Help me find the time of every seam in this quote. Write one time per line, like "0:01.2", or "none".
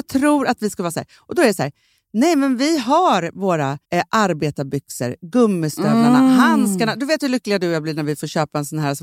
0:03.8